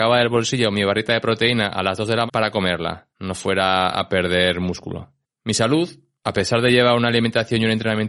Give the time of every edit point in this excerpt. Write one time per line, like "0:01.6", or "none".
0:02.3
0:03.1